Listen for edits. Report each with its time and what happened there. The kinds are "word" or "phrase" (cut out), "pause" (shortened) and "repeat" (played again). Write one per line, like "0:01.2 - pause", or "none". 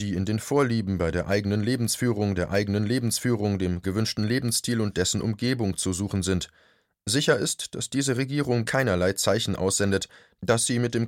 0:02.3 - repeat
0:08.6 - word